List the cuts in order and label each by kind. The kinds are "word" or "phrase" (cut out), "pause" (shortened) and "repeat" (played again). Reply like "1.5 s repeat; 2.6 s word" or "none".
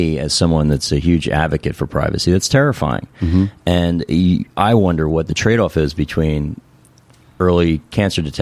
none